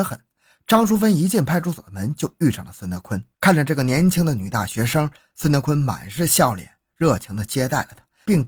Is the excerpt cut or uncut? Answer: cut